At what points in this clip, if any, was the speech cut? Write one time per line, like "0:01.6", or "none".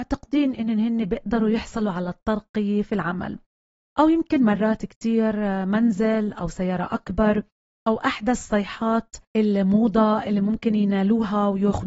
0:09.2